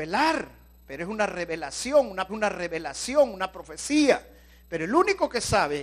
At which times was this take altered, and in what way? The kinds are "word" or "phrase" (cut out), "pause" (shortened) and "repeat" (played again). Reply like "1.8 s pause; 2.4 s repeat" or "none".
2.3 s repeat